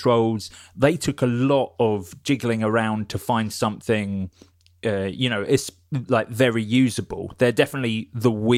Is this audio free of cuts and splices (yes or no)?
yes